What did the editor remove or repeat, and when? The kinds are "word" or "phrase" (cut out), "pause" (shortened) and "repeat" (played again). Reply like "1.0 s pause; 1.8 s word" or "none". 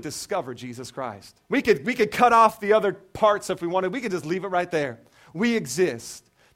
1.4 s pause